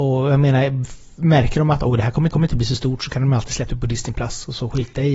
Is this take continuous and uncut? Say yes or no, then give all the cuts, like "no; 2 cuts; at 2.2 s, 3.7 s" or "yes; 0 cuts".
no; 2 cuts; at 2.3 s, 3.7 s